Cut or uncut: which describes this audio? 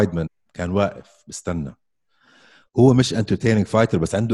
uncut